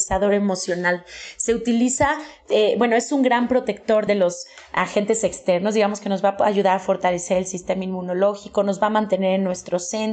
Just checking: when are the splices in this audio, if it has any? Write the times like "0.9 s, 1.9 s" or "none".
4.1 s